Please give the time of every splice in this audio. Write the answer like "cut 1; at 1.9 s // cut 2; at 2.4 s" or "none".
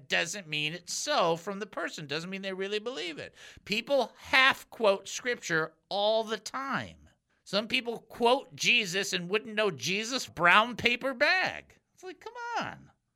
cut 1; at 7.3 s // cut 2; at 10.3 s